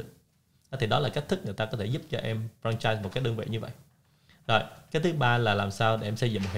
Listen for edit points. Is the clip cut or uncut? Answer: uncut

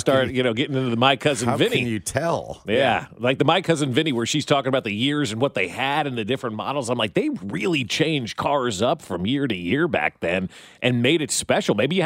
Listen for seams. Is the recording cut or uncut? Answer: uncut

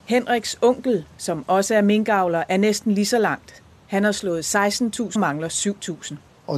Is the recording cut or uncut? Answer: cut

